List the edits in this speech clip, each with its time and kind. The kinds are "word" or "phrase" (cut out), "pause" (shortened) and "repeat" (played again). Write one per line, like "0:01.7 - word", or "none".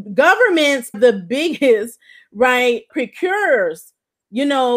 0:00.9 - word
0:02.9 - word